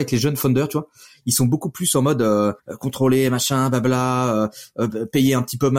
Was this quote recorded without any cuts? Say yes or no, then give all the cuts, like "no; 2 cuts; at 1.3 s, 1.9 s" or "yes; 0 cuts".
no; 1 cut; at 2.6 s